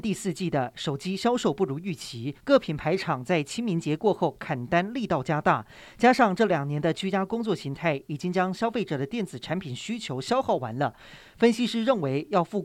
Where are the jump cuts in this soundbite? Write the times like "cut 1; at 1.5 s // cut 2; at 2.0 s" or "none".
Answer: cut 1; at 2.4 s